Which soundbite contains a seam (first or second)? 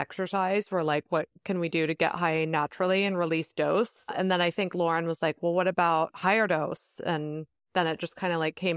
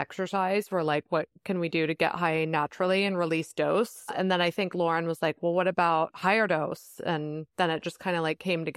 second